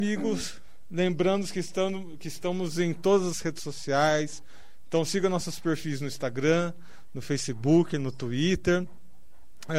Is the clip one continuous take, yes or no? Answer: yes